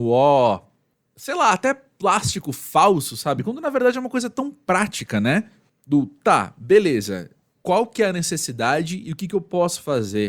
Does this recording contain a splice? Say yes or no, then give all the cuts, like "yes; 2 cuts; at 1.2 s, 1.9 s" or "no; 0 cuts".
no; 0 cuts